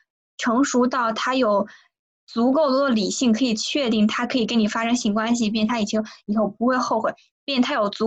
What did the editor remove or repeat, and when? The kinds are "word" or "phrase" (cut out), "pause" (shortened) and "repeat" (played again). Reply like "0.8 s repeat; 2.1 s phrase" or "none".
none